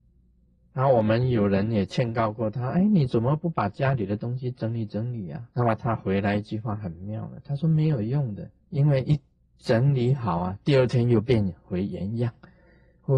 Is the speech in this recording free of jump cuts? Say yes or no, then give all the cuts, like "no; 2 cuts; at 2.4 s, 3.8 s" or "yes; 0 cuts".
no; 2 cuts; at 5.5 s, 8.6 s